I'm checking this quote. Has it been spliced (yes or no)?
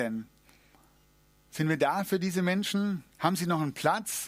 yes